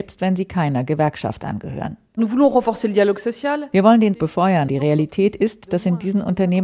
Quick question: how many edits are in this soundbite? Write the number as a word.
two